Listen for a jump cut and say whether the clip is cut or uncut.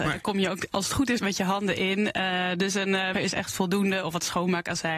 cut